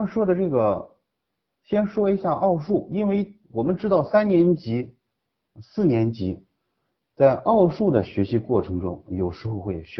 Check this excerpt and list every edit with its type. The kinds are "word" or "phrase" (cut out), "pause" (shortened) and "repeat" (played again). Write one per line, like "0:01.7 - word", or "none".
0:03.4 - pause